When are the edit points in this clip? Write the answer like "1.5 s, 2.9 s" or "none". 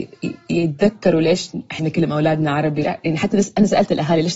1.8 s, 2.8 s